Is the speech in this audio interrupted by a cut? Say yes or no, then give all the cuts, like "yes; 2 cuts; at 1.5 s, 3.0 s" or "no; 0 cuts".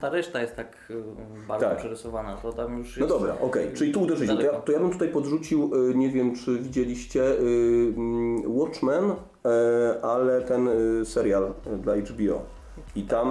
no; 0 cuts